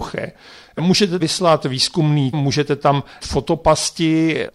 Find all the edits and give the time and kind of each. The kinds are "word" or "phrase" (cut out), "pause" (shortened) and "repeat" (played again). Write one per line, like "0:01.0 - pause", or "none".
0:01.2 - word
0:02.3 - word
0:03.2 - word